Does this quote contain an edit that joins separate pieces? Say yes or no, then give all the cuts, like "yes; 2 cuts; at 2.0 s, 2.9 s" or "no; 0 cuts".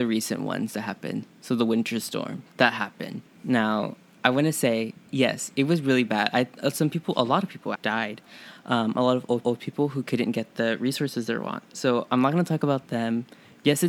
yes; 3 cuts; at 3.3 s, 7.8 s, 9.4 s